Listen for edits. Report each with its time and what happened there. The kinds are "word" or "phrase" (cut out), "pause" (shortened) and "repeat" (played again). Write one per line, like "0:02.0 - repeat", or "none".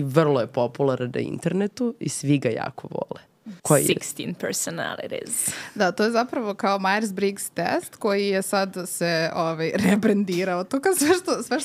0:03.6 - pause